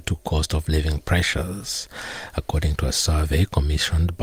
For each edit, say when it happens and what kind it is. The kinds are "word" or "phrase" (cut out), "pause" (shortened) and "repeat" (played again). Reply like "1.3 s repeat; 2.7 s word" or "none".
none